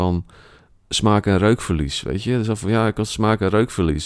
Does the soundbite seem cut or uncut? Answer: uncut